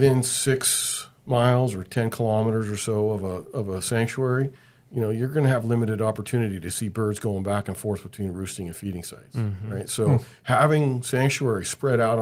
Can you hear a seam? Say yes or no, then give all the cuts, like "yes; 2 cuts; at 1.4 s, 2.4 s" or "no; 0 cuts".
no; 0 cuts